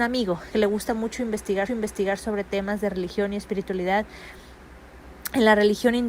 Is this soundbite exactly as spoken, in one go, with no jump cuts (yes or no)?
no